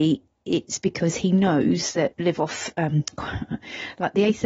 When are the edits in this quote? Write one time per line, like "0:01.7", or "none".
0:02.1